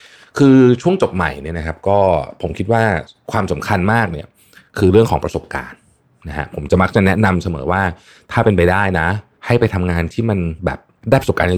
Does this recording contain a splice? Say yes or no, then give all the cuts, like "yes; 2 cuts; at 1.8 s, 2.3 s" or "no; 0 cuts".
no; 0 cuts